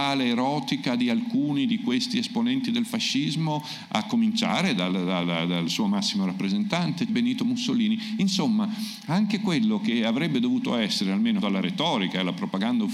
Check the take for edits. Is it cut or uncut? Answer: cut